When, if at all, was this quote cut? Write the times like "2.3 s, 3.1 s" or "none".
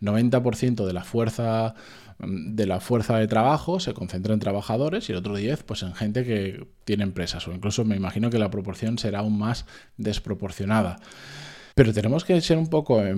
11.7 s